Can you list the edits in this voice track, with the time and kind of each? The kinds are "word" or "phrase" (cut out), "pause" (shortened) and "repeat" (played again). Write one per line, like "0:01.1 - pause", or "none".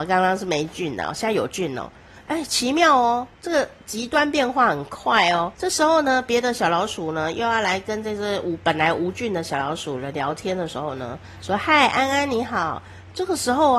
0:03.3 - pause
0:05.5 - pause

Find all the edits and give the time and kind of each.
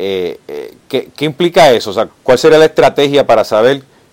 0:02.1 - word

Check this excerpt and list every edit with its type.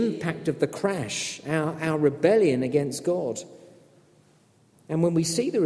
none

